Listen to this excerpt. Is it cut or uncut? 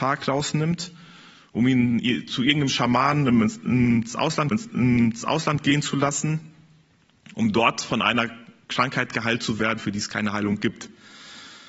cut